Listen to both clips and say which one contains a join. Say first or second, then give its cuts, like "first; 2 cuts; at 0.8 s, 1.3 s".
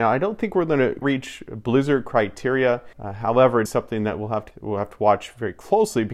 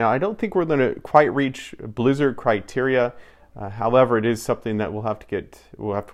first; 4 cuts; at 1.0 s, 2.9 s, 3.7 s, 4.5 s